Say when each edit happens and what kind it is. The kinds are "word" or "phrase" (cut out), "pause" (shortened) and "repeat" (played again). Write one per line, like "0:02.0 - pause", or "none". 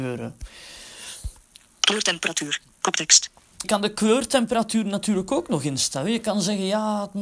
0:03.6 - word